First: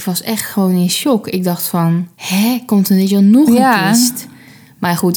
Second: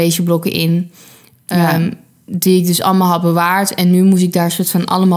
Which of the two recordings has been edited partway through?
first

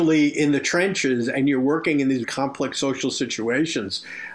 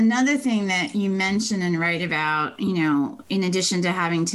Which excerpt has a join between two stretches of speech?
first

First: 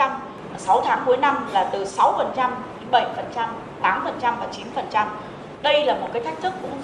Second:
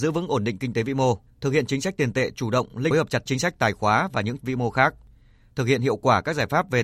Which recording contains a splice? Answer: second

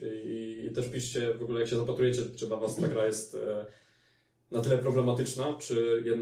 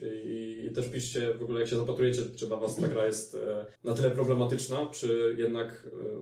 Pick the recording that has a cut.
second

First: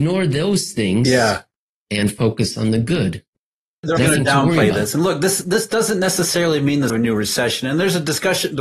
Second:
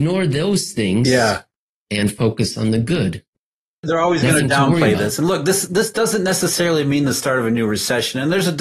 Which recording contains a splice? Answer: first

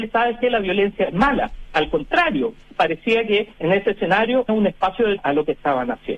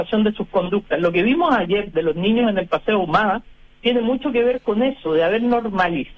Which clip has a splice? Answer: first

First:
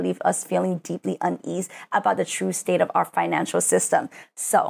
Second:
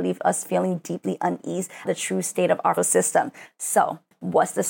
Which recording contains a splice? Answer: second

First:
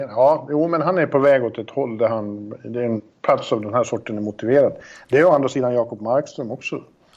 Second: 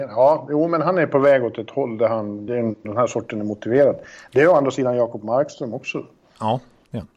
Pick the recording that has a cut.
second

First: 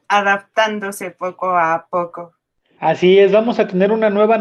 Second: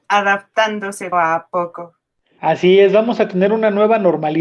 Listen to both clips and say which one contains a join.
second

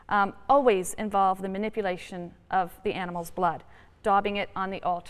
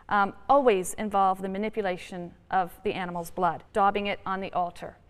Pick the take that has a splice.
second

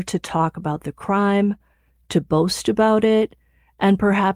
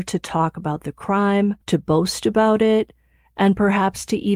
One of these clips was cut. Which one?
second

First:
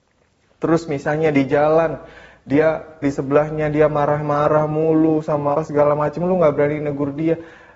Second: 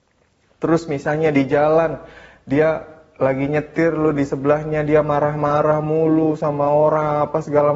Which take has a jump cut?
first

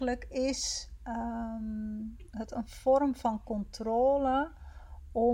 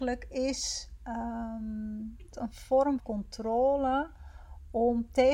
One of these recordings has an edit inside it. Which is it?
second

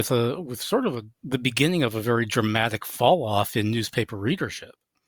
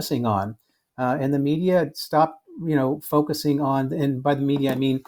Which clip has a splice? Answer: first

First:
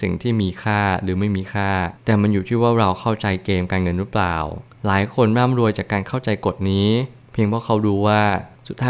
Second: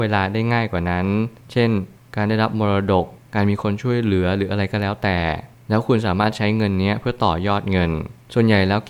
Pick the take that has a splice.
first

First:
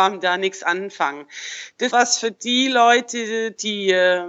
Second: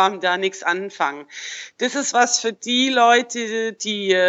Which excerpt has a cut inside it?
first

